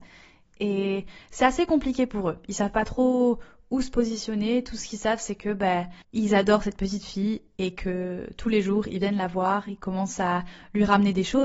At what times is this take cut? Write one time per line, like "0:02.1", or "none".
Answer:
0:06.0